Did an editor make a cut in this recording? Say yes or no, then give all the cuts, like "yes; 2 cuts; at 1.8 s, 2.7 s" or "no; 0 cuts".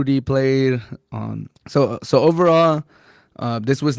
yes; 1 cut; at 1.6 s